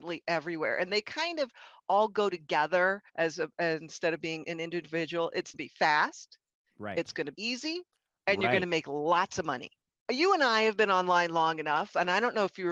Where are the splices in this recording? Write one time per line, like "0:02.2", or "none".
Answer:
0:03.1
0:05.5
0:07.3